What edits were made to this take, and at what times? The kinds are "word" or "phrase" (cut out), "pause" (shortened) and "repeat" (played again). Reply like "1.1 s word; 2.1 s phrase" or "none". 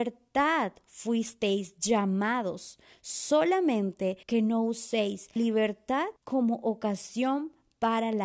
4.2 s pause; 5.4 s word; 6.2 s pause